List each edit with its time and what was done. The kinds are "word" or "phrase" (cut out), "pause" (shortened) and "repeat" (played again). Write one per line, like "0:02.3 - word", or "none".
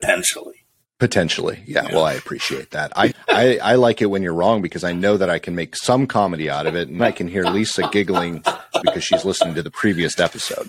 0:03.1 - word
0:07.0 - word
0:08.8 - phrase